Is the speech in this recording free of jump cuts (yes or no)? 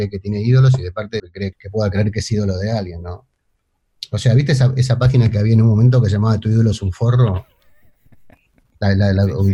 no